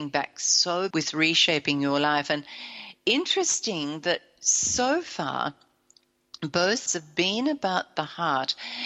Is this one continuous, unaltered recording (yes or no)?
no